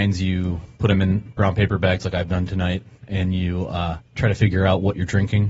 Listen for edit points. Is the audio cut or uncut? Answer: cut